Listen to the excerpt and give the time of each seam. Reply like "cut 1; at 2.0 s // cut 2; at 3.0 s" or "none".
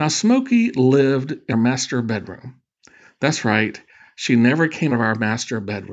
cut 1; at 1.5 s // cut 2; at 4.9 s